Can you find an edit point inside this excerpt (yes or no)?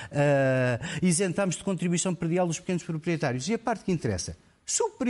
no